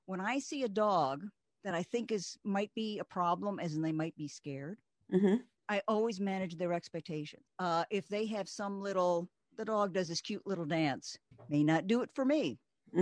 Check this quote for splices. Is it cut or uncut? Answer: uncut